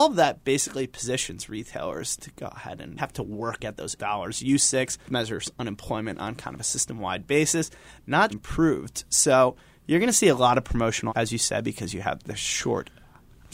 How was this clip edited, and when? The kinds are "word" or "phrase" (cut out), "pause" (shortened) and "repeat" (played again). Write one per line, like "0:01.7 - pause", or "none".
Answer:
0:03.0 - word
0:03.6 - word
0:04.0 - word
0:05.1 - word
0:08.3 - word
0:11.1 - word